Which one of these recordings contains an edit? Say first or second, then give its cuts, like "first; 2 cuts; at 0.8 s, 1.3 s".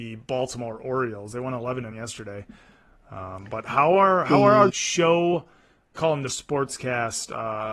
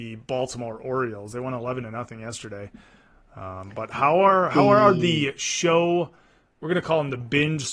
first; 4 cuts; at 1.9 s, 4.7 s, 6.0 s, 6.3 s